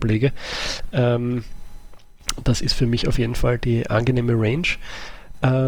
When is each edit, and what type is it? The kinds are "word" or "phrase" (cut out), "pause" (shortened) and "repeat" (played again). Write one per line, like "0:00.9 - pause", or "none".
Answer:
none